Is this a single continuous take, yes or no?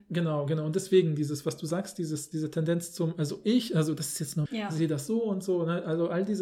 no